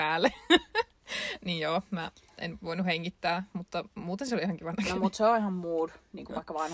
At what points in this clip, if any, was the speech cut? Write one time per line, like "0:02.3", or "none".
none